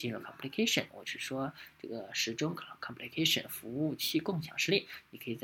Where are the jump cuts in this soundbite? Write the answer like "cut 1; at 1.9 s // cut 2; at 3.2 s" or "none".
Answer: none

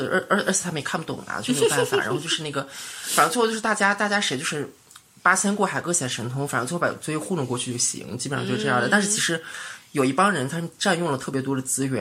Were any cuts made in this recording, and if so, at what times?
cut 1; at 5.0 s

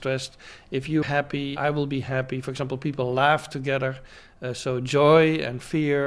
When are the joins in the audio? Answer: cut 1; at 1.0 s // cut 2; at 1.6 s

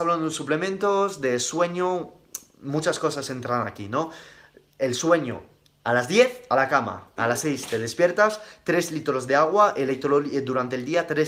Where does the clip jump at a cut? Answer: none

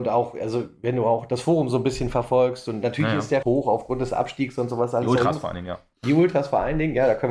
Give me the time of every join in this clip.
cut 1; at 3.4 s

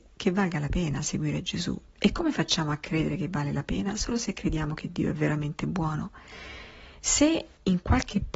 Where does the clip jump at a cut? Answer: cut 1; at 1.9 s

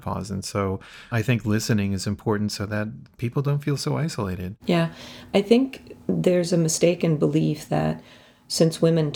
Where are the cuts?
none

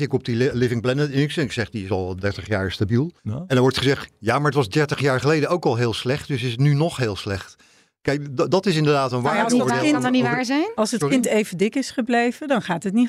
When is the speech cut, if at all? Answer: cut 1; at 3.2 s

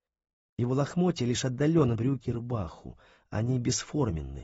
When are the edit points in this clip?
cut 1; at 1.9 s // cut 2; at 2.2 s

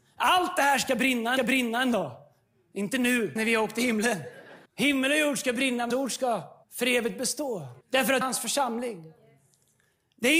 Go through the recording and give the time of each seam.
cut 1; at 1.4 s // cut 2; at 3.4 s // cut 3; at 4.7 s // cut 4; at 5.9 s // cut 5; at 6.6 s // cut 6; at 7.8 s // cut 7; at 8.2 s

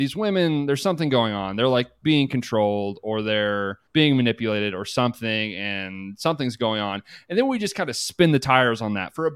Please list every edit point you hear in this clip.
cut 1; at 3.9 s

